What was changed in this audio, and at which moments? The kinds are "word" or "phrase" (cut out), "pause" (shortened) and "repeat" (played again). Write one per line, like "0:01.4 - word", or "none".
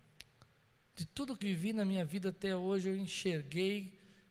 0:01.4 - word